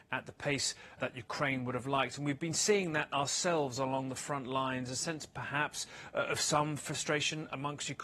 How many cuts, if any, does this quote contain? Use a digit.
1